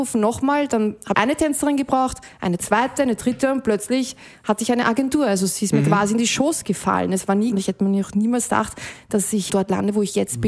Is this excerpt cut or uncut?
cut